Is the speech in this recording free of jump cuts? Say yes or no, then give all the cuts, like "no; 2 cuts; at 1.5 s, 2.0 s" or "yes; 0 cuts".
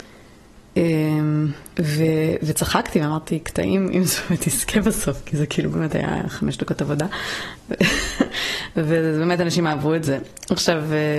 no; 1 cut; at 1.7 s